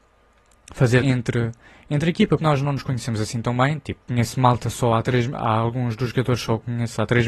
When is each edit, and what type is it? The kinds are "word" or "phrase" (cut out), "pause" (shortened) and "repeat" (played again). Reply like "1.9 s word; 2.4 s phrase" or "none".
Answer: 1.0 s word; 2.4 s phrase; 4.0 s pause